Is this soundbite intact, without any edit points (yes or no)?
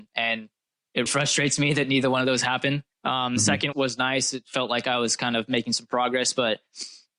no